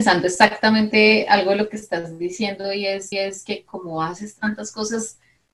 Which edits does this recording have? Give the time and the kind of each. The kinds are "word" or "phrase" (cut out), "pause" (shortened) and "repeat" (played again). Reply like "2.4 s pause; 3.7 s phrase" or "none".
3.1 s repeat